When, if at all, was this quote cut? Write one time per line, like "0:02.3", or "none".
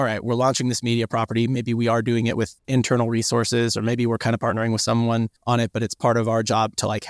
0:02.6
0:05.4